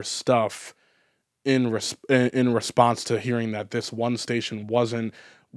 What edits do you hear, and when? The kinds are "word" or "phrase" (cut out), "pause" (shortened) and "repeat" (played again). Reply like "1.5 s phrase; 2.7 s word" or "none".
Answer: 2.3 s word